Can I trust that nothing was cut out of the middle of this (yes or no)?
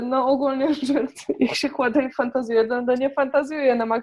yes